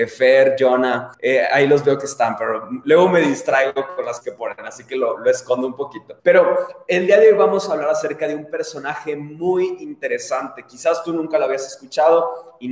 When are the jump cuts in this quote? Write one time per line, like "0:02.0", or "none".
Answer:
0:01.1
0:04.2
0:06.2

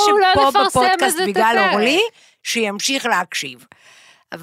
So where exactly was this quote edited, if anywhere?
none

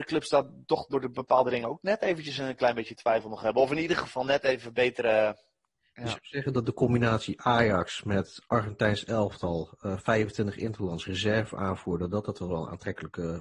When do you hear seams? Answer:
none

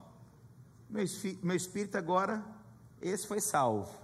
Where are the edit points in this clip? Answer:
none

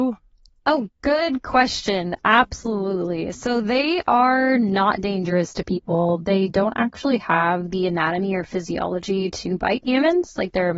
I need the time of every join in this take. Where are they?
none

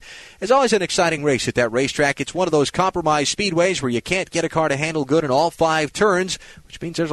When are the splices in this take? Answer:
none

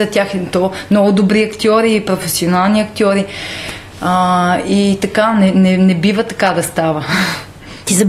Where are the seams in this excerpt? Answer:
none

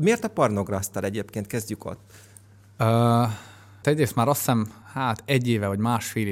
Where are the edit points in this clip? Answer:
0:03.8
0:04.8

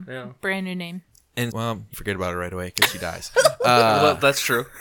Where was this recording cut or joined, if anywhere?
0:01.5
0:01.9

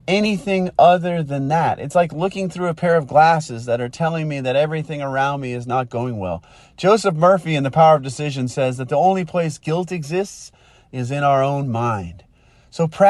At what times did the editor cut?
none

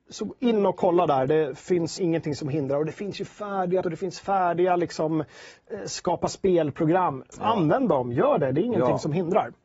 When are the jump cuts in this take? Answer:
0:02.0
0:03.8

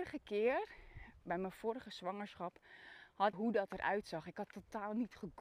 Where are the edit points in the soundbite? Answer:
0:01.2
0:03.3

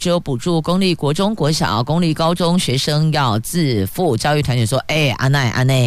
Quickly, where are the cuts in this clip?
none

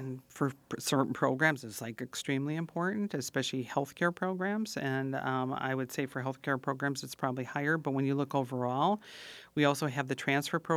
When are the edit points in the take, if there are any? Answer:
none

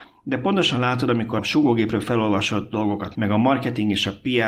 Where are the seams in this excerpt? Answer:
0:01.4
0:03.1

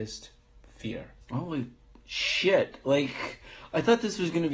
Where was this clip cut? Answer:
0:01.2

